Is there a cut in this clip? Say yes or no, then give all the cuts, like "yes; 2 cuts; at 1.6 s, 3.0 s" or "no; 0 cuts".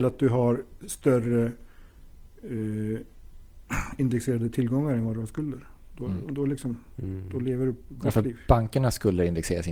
no; 0 cuts